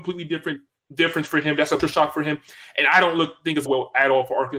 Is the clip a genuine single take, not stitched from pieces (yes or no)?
no